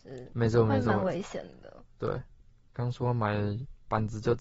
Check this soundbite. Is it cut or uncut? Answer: uncut